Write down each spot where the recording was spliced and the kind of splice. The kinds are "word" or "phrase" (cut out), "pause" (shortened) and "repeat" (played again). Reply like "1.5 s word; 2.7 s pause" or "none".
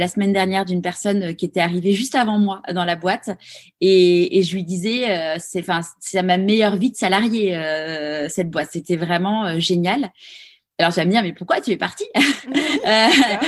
none